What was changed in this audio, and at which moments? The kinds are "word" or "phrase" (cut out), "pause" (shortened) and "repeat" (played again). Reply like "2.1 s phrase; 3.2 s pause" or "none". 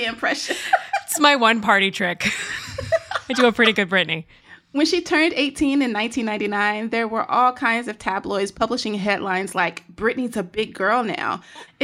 none